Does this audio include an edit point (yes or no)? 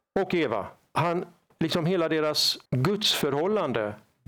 yes